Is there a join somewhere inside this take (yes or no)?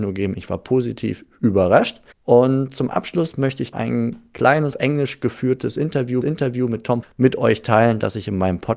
yes